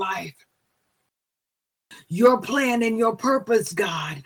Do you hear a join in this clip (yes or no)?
no